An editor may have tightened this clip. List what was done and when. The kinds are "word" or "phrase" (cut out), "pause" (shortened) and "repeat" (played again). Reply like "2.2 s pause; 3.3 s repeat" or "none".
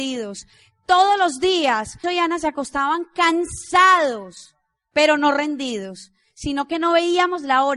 2.0 s word